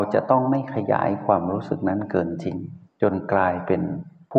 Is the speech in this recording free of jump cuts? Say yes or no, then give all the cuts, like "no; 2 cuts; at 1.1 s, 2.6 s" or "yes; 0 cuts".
no; 1 cut; at 2.8 s